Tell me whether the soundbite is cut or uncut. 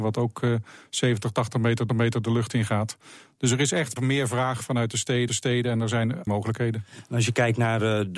cut